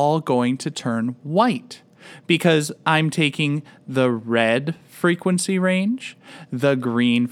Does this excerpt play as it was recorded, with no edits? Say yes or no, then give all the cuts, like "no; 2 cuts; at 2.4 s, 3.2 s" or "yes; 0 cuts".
yes; 0 cuts